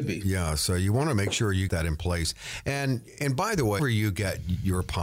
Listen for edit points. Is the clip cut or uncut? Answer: cut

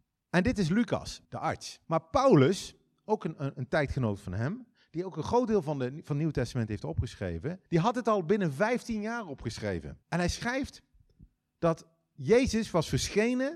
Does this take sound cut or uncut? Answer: cut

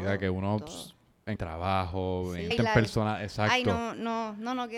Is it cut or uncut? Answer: cut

